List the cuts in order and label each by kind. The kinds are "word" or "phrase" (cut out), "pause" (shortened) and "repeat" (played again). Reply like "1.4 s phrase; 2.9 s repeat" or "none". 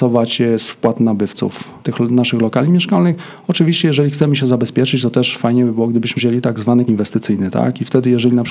1.8 s pause; 6.2 s phrase; 6.9 s word